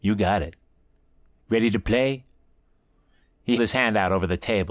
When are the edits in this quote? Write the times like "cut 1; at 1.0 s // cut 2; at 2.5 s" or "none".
cut 1; at 3.6 s